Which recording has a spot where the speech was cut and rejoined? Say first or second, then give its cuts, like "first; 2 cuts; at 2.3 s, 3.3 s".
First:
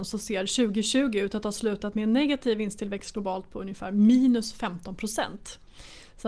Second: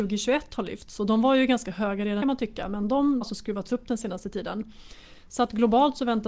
second; 2 cuts; at 2.2 s, 3.2 s